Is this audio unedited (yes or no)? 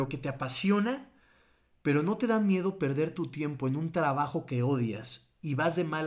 yes